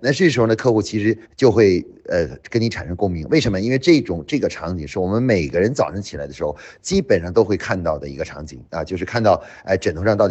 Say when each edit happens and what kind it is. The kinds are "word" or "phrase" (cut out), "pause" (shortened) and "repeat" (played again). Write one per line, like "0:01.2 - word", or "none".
0:01.2 - pause

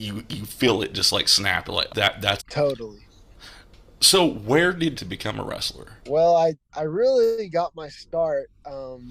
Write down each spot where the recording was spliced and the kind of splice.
0:01.9 - word
0:02.4 - phrase
0:04.9 - phrase
0:06.0 - pause

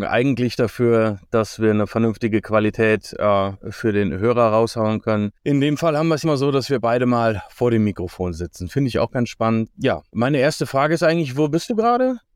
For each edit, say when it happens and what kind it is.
0:06.2 - word
0:10.1 - pause

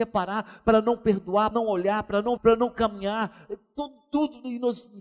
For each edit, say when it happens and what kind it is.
0:01.5 - word
0:02.4 - word

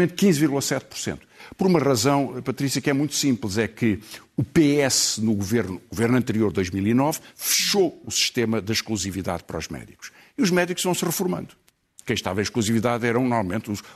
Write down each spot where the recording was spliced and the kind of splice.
none

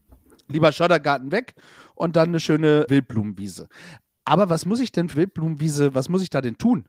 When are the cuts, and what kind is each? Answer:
0:02.9 - word
0:05.1 - word

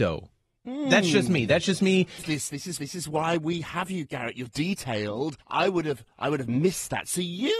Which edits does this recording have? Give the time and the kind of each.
0:02.8 - repeat
0:04.5 - word
0:05.4 - pause

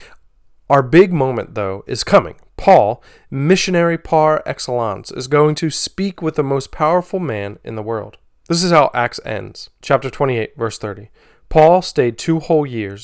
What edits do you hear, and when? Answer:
none

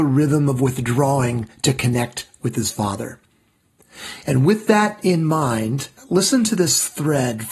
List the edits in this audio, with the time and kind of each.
0:06.0 - pause

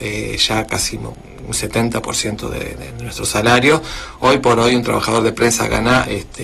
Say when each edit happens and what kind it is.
none

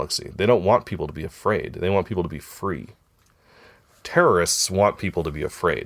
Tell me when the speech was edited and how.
none

